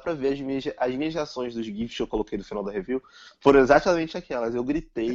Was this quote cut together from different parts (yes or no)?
no